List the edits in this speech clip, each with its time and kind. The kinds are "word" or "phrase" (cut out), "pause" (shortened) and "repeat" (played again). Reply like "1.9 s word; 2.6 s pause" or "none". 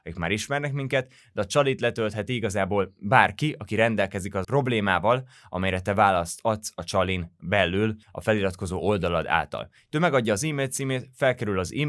4.4 s word; 8.0 s pause